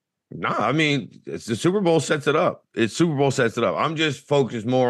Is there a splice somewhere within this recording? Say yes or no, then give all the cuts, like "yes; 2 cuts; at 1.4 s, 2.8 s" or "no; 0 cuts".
no; 0 cuts